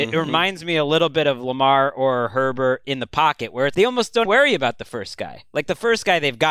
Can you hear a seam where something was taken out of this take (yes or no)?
yes